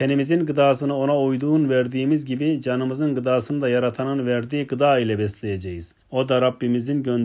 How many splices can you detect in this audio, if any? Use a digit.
1